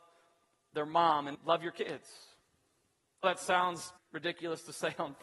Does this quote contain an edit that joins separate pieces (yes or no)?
yes